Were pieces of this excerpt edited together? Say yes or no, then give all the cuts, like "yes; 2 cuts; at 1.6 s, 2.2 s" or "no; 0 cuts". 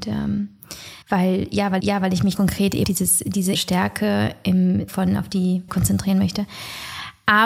yes; 7 cuts; at 1.0 s, 1.8 s, 2.3 s, 2.8 s, 3.5 s, 4.9 s, 5.7 s